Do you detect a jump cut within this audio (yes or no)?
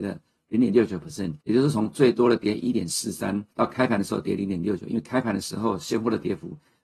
yes